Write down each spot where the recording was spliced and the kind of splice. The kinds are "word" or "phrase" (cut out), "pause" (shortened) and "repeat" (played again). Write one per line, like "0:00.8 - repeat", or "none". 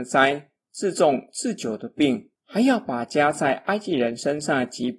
0:02.4 - pause